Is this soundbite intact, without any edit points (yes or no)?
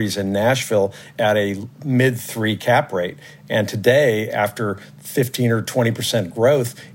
yes